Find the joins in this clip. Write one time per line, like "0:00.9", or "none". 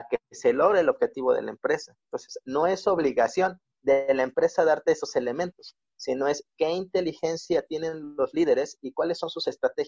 0:03.7